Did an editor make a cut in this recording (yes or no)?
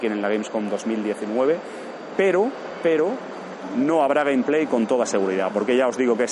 no